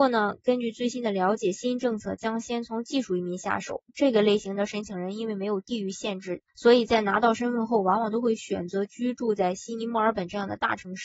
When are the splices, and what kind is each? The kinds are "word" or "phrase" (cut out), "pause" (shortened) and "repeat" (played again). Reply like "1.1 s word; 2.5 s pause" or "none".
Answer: 3.9 s pause; 6.5 s pause